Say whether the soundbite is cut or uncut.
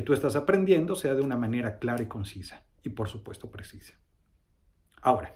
uncut